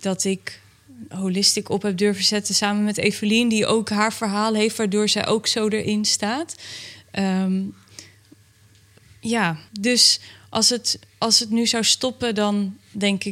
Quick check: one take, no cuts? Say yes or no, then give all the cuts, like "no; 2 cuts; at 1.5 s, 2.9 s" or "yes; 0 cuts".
no; 1 cut; at 9.7 s